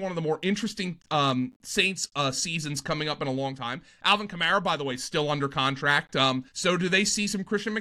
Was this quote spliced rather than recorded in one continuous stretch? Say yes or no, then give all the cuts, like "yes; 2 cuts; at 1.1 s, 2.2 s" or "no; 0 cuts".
yes; 1 cut; at 6.5 s